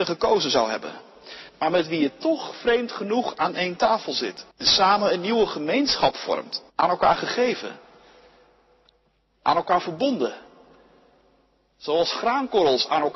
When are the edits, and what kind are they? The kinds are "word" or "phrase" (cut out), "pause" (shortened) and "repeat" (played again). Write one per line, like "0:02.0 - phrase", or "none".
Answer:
0:01.5 - pause
0:04.5 - pause
0:06.7 - pause

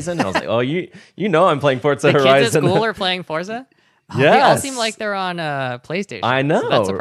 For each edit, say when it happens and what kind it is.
none

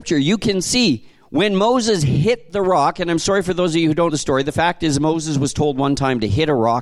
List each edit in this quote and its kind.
0:04.1 - word

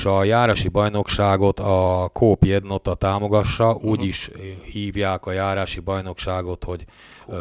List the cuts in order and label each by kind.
none

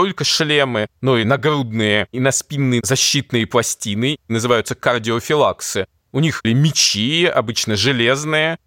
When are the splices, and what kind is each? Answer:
0:06.4 - word

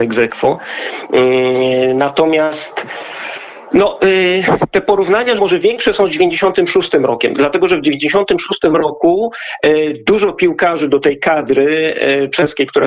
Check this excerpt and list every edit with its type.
0:05.4 - word

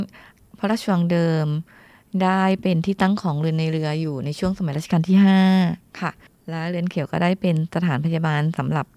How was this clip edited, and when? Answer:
0:06.3 - pause

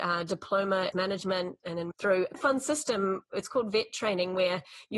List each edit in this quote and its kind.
0:00.9 - phrase
0:01.6 - word
0:01.9 - word
0:02.3 - word

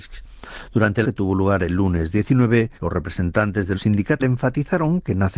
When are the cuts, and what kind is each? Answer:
0:01.0 - phrase
0:02.8 - pause
0:03.7 - word
0:04.2 - word

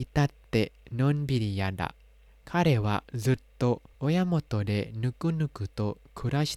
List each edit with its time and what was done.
0:02.3 - pause
0:03.9 - pause

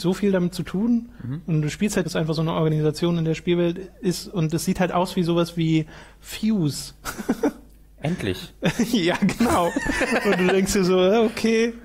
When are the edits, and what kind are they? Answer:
0:02.0 - phrase

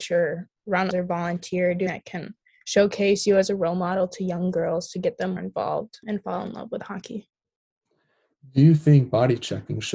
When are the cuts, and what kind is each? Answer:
0:00.9 - word
0:01.9 - word
0:05.4 - word
0:06.0 - word

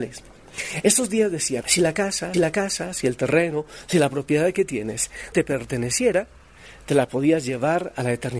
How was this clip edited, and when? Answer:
0:01.6 - word
0:02.3 - repeat
0:05.3 - word

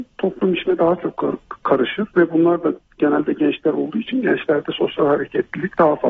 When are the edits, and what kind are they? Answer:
none

